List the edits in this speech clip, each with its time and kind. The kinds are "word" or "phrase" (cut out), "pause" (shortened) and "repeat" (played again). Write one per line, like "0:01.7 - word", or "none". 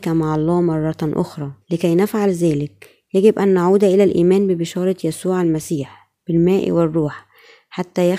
0:01.6 - pause